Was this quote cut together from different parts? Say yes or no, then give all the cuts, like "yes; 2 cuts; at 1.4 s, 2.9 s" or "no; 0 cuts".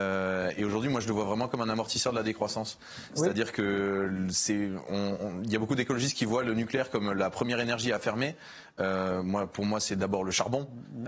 no; 0 cuts